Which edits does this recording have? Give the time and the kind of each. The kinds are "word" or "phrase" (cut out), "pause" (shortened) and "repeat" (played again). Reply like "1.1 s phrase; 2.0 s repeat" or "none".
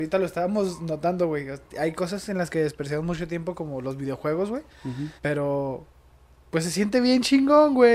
1.7 s pause; 5.2 s pause